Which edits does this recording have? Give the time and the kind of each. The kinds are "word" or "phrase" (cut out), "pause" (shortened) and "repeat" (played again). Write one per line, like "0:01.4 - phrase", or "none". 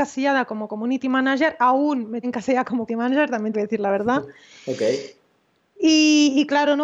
0:02.2 - word
0:02.9 - word
0:03.5 - phrase